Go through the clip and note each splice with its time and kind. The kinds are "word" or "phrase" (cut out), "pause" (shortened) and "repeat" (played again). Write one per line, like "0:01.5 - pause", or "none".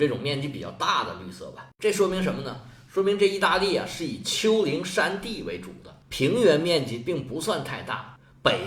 0:06.0 - pause